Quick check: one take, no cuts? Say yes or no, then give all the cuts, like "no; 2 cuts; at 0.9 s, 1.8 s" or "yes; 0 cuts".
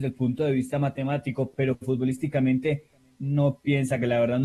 yes; 0 cuts